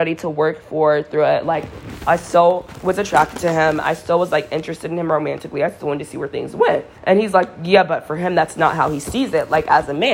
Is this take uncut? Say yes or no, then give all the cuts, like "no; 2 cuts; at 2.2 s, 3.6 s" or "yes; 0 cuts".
no; 1 cut; at 6.9 s